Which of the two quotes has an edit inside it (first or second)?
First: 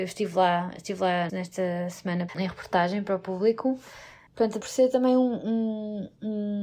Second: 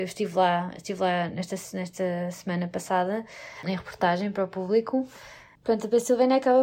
first